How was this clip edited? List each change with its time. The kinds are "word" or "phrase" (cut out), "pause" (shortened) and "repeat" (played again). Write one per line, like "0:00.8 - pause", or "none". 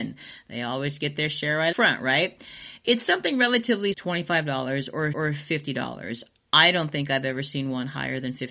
0:01.7 - word
0:03.9 - word
0:05.1 - repeat